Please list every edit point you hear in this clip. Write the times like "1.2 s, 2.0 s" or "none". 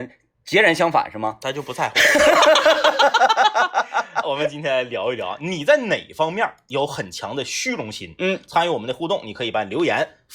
4.2 s